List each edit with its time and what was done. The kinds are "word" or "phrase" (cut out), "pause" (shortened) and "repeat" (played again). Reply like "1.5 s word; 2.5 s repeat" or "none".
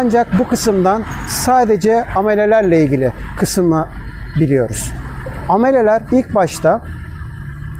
6.1 s word